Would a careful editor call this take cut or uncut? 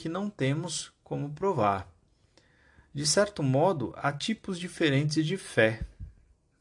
uncut